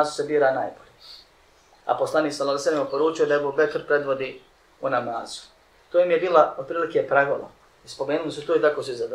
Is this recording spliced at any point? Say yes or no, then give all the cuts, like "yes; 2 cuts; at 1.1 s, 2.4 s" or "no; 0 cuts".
no; 0 cuts